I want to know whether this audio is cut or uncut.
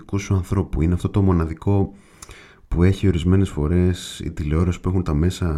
uncut